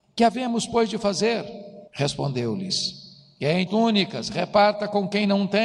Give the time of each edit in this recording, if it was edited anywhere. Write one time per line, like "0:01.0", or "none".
0:01.9
0:03.7